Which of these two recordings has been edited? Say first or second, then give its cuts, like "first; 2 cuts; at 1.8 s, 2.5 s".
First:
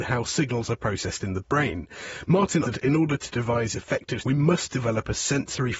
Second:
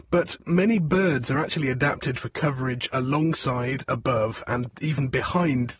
first; 3 cuts; at 1.4 s, 2.6 s, 4.2 s